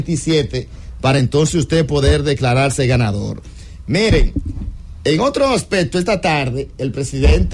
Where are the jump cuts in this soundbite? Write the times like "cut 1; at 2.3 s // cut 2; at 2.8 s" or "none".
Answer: none